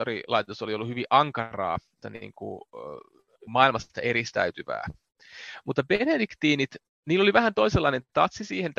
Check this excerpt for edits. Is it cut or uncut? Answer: cut